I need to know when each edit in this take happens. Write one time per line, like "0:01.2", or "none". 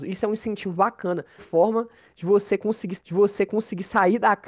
0:01.4
0:03.0

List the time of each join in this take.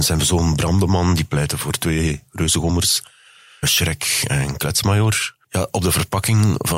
0:03.6
0:05.4

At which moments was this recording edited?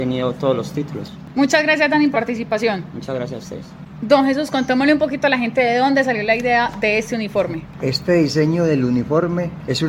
0:02.1

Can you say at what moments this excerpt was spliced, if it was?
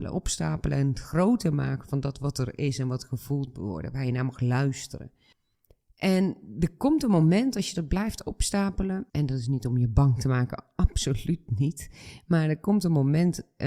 0:05.3
0:09.1

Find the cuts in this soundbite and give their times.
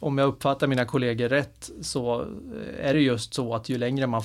none

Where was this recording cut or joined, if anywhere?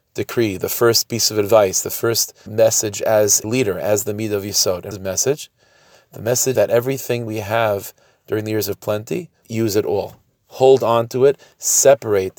0:02.5
0:03.4
0:04.9
0:06.5
0:07.3
0:09.4

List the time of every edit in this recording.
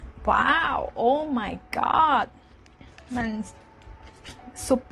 none

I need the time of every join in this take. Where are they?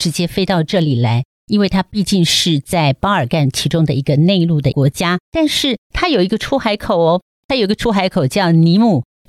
0:05.2

